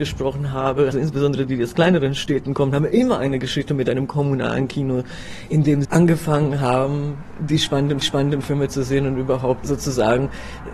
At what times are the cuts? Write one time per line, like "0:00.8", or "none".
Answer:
0:00.9
0:05.8
0:08.0
0:09.6